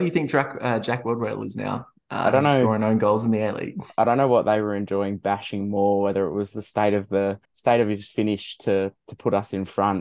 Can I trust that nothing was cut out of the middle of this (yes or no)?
no